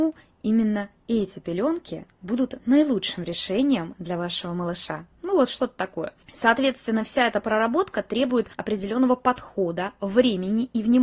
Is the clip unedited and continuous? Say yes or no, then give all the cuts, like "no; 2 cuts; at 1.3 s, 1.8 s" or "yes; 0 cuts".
no; 4 cuts; at 2.1 s, 5.1 s, 6.2 s, 8.5 s